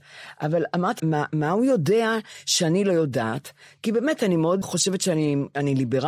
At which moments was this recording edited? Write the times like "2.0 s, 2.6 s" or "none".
1.0 s, 4.6 s